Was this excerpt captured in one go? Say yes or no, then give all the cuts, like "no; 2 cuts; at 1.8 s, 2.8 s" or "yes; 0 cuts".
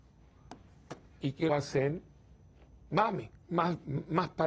no; 2 cuts; at 1.5 s, 3.4 s